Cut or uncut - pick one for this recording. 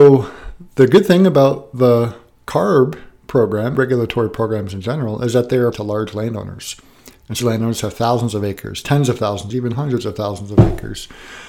cut